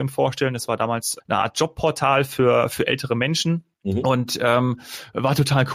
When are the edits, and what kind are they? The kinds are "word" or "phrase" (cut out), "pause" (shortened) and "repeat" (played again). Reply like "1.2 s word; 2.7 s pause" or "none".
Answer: 1.2 s word; 3.7 s pause